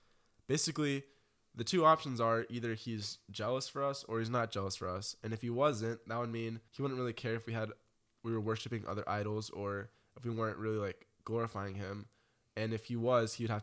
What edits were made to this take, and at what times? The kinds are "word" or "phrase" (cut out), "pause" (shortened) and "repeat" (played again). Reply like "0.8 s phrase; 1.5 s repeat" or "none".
6.7 s pause